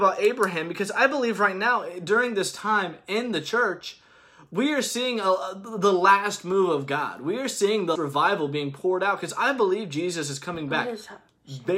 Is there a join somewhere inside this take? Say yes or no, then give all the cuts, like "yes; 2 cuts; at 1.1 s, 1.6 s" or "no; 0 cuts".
yes; 1 cut; at 7.9 s